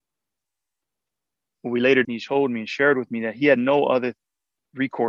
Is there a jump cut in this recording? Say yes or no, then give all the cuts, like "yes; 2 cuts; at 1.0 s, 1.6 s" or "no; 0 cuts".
yes; 1 cut; at 2.0 s